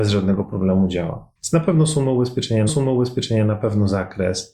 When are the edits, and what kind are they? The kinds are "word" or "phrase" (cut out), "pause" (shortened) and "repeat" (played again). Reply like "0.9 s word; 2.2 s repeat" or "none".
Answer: 1.4 s pause; 2.7 s repeat